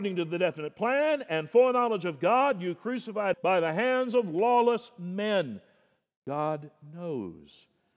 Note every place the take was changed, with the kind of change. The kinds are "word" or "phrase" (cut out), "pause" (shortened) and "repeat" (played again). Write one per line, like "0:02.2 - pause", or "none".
0:03.3 - phrase

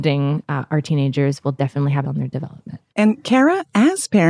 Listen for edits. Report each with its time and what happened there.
0:02.0 - phrase
0:02.9 - pause

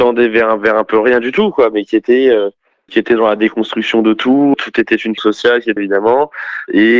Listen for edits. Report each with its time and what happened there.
0:02.9 - word
0:04.5 - word
0:05.2 - word
0:05.8 - word

